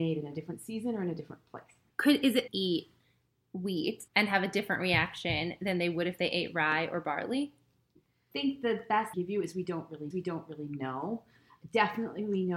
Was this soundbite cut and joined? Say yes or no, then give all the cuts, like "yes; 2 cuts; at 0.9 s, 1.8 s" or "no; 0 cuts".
yes; 6 cuts; at 1.9 s, 2.5 s, 4.1 s, 8.3 s, 9.1 s, 10.1 s